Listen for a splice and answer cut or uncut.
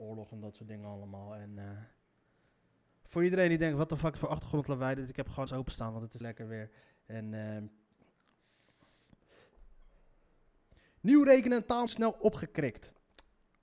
cut